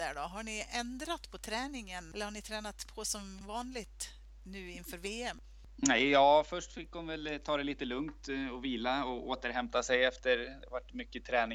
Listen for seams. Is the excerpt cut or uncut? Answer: uncut